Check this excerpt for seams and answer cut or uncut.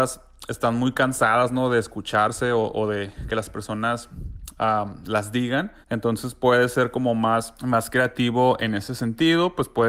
cut